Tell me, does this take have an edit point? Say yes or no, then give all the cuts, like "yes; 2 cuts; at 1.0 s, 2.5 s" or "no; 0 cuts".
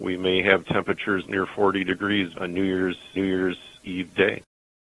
yes; 3 cuts; at 1.2 s, 2.3 s, 3.2 s